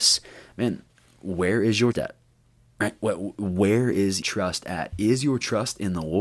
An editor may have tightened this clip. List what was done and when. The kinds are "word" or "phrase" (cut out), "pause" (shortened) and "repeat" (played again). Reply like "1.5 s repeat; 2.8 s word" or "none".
1.9 s word; 4.2 s word